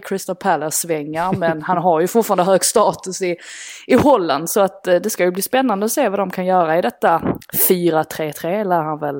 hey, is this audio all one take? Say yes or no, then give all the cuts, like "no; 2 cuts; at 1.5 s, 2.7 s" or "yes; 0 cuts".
yes; 0 cuts